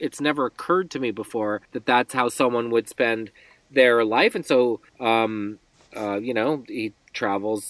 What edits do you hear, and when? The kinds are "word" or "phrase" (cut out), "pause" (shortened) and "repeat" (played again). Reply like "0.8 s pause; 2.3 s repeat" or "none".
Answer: 1.6 s pause; 4.9 s pause